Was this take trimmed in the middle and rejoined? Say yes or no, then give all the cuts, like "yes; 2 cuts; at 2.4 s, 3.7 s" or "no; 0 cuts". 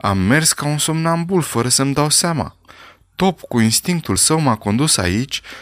no; 0 cuts